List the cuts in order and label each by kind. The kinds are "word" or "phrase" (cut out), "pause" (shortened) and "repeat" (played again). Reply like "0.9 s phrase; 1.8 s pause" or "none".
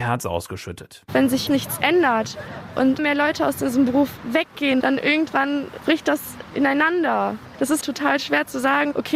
1.5 s word; 3.0 s word; 7.8 s word